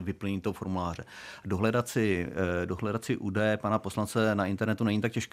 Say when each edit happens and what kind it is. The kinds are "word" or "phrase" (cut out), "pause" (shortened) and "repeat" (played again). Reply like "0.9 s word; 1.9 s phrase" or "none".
none